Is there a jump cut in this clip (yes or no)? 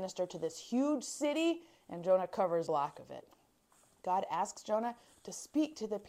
yes